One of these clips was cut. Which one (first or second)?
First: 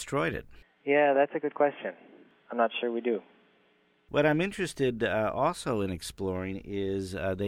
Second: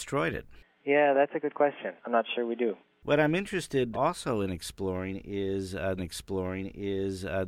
second